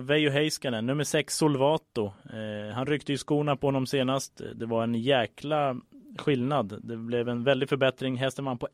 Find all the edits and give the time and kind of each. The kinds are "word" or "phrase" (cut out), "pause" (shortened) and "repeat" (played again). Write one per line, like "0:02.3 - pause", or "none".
none